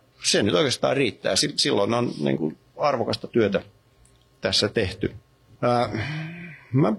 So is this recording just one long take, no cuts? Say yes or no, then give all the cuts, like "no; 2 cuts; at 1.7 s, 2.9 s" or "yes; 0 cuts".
yes; 0 cuts